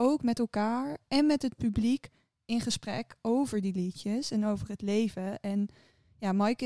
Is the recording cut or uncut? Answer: uncut